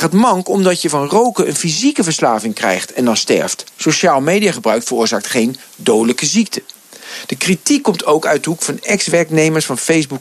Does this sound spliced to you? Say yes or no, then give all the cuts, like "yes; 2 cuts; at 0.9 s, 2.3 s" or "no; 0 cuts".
no; 0 cuts